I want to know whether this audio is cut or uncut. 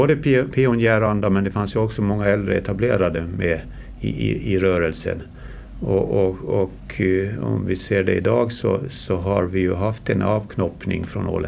uncut